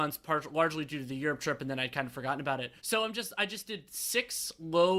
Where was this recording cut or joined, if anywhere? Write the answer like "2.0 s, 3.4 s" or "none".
2.8 s